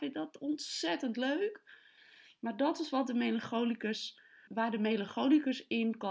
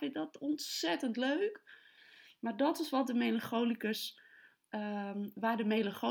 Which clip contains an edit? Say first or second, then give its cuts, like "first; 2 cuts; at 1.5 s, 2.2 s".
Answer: first; 1 cut; at 4.5 s